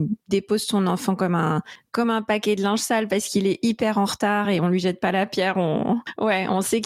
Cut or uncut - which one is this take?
uncut